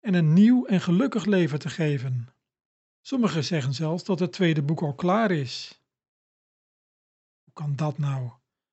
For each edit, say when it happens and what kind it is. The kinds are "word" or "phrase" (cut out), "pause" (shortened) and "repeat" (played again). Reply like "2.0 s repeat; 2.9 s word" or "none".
2.7 s pause